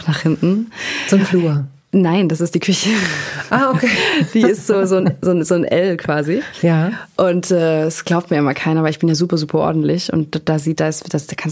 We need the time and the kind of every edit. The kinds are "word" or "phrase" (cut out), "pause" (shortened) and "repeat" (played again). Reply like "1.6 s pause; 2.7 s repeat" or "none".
none